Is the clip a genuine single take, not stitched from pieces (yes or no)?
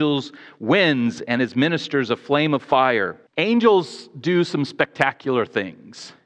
no